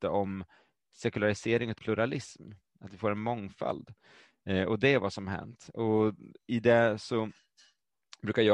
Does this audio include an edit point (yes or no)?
yes